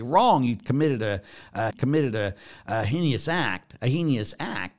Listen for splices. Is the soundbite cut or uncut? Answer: cut